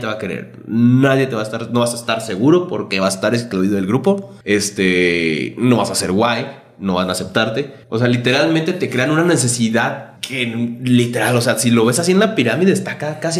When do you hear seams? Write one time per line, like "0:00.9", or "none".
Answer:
0:04.4
0:07.8
0:10.2